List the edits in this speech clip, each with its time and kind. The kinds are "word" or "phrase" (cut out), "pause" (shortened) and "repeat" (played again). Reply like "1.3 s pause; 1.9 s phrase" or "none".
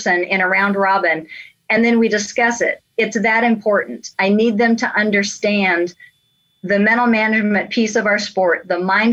none